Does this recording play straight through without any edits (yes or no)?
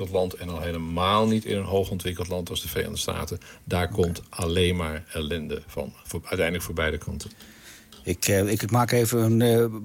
yes